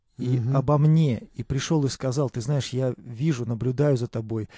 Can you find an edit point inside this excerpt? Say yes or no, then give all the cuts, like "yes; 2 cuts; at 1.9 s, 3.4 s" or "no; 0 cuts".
no; 0 cuts